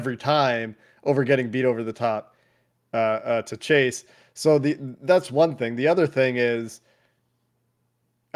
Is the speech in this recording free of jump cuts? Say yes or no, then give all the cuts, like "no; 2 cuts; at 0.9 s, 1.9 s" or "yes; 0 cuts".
yes; 0 cuts